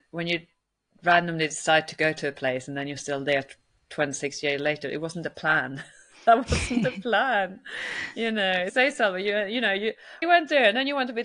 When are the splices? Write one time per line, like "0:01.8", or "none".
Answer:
0:08.7
0:10.2